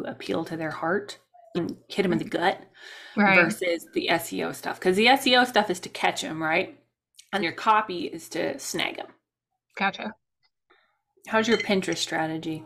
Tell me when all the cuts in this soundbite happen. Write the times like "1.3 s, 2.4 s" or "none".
1.5 s, 7.4 s